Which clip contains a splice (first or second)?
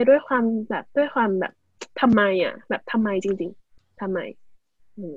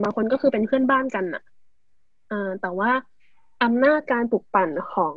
first